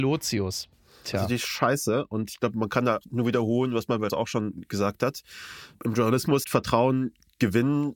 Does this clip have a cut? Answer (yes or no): yes